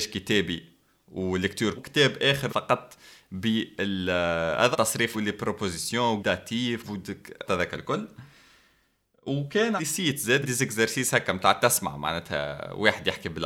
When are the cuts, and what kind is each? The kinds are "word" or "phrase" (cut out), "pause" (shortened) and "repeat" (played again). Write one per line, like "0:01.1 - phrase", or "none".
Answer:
0:01.8 - word
0:02.5 - word
0:04.7 - word
0:05.1 - word
0:06.2 - word
0:06.8 - word
0:07.5 - word
0:09.8 - word
0:10.4 - word